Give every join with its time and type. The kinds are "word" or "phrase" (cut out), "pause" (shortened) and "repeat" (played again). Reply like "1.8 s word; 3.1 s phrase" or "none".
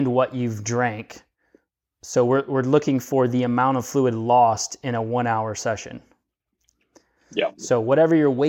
none